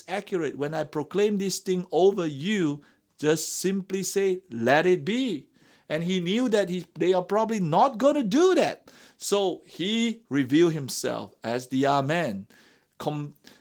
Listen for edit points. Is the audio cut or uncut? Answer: uncut